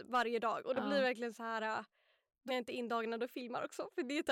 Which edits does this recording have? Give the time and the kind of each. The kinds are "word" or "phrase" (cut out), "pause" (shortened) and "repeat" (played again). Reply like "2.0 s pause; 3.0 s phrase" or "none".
2.5 s word